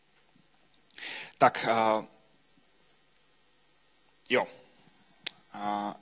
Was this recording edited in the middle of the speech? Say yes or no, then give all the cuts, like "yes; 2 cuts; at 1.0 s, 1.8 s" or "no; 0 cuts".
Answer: no; 0 cuts